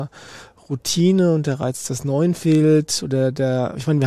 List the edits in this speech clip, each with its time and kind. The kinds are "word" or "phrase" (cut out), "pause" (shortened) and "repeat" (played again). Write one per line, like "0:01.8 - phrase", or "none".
none